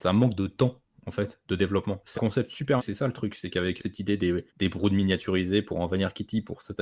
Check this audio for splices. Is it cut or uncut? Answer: cut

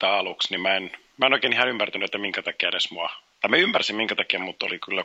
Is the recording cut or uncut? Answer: uncut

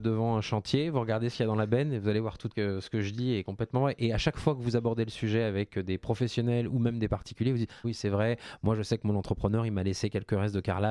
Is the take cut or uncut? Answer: cut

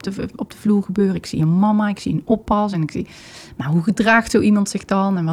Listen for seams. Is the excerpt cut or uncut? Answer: uncut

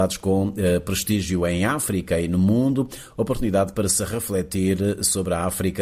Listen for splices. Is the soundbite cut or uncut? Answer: uncut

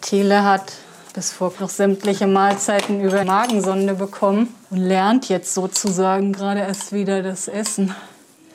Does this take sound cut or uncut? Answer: cut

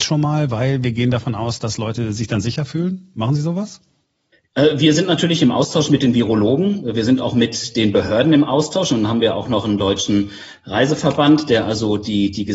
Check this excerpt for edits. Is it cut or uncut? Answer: uncut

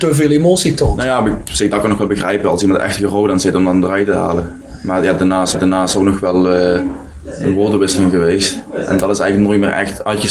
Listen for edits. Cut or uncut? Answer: cut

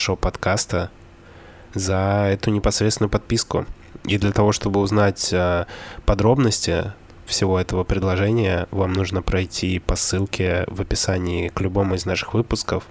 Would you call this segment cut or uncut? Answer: uncut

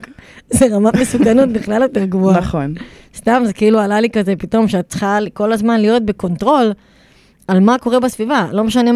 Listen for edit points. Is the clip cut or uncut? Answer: cut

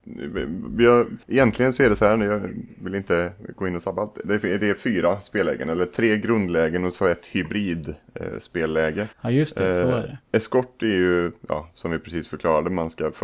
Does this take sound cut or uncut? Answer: cut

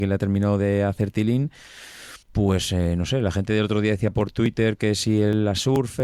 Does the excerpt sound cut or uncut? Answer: cut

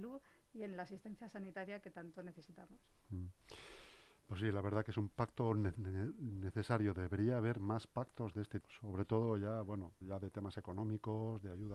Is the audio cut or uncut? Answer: cut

